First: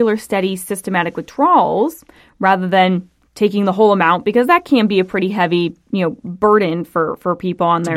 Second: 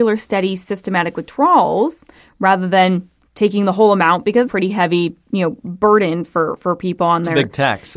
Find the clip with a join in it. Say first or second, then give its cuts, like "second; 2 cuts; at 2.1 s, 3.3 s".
second; 1 cut; at 4.5 s